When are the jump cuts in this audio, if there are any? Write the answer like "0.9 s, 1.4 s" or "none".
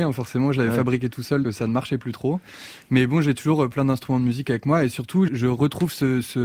1.4 s, 5.3 s